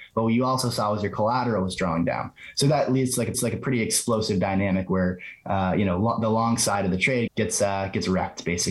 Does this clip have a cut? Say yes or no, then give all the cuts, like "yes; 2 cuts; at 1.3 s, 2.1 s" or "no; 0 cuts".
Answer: yes; 2 cuts; at 3.3 s, 7.3 s